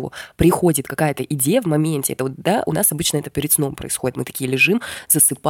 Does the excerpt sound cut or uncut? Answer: uncut